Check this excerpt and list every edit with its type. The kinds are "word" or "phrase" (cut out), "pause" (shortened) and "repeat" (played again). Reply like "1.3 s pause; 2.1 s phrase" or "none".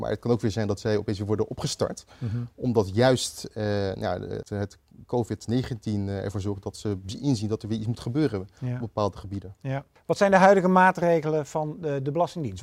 4.4 s word